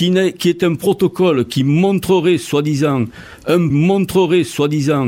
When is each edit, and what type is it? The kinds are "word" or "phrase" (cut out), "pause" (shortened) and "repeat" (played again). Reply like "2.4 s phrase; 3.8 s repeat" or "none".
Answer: 3.7 s repeat